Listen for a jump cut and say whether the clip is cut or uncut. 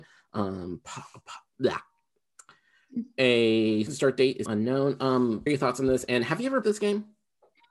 cut